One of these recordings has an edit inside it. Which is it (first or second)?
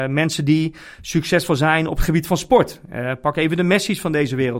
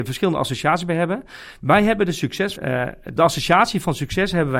second